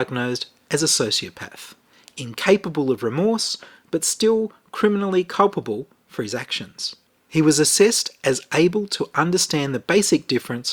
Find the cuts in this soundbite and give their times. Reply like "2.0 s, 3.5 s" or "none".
7.1 s